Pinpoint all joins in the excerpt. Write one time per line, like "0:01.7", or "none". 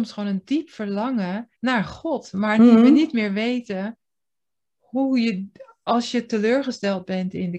0:01.6